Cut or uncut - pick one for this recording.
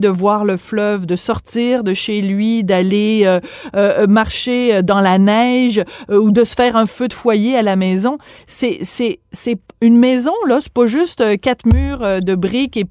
uncut